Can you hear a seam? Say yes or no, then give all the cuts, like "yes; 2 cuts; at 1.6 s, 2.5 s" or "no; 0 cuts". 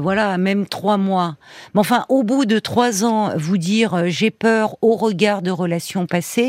no; 0 cuts